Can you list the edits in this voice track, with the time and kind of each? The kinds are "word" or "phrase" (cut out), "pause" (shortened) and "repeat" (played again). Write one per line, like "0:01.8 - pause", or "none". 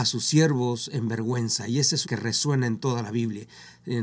0:02.0 - phrase